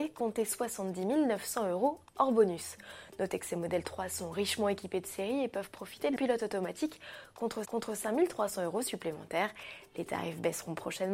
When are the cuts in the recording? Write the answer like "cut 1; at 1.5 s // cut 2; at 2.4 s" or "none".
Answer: cut 1; at 2.1 s // cut 2; at 6.2 s // cut 3; at 7.6 s